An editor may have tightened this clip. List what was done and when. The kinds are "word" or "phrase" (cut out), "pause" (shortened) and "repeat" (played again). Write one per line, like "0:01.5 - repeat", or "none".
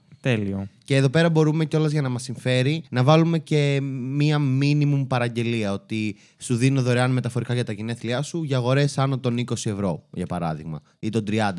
0:02.9 - pause